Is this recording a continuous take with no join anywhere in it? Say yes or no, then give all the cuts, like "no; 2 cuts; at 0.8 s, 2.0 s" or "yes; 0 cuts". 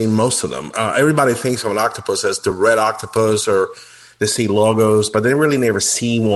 yes; 0 cuts